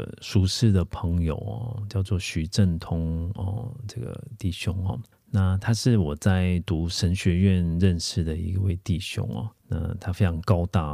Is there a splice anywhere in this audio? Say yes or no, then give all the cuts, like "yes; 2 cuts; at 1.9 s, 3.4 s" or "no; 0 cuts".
yes; 2 cuts; at 5.1 s, 9.6 s